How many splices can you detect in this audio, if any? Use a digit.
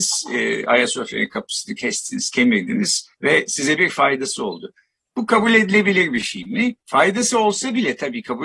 2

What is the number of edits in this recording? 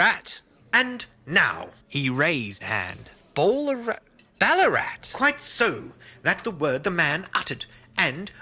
3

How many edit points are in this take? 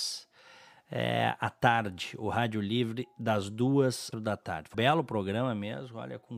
2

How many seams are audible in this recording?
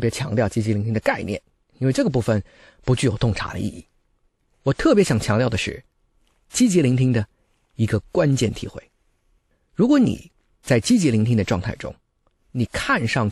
0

